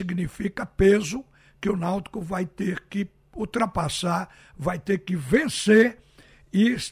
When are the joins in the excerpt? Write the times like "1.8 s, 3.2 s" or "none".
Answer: none